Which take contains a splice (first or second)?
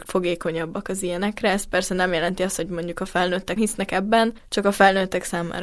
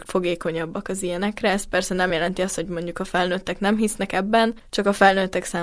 first